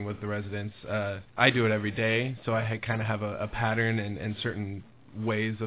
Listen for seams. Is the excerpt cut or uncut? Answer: cut